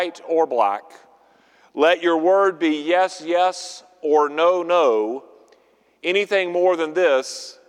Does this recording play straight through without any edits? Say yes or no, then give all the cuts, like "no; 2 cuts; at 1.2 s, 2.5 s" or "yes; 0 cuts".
yes; 0 cuts